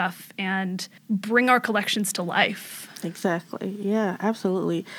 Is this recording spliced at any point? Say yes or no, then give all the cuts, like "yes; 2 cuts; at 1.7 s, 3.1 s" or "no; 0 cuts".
yes; 1 cut; at 1.0 s